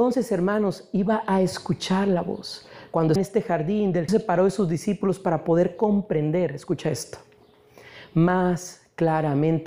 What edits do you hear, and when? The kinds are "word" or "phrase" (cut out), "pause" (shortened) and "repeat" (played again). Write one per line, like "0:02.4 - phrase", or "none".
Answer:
0:03.2 - word
0:04.1 - phrase